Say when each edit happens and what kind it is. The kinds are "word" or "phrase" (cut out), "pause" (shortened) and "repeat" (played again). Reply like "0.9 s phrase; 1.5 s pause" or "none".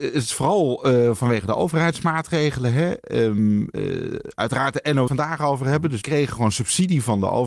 5.1 s phrase; 6.0 s word